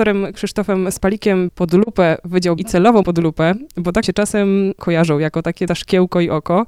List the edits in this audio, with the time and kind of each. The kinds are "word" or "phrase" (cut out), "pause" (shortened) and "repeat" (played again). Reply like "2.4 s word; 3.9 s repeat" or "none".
1.5 s word; 2.6 s word; 3.0 s word; 4.0 s word; 4.8 s word; 5.7 s word